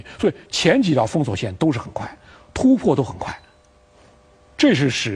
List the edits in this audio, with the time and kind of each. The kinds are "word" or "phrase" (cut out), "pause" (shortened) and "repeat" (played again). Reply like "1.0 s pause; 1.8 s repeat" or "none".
none